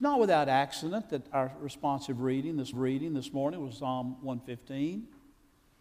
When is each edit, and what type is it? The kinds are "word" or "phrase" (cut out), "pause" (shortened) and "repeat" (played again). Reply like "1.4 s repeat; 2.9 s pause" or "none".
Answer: 2.7 s repeat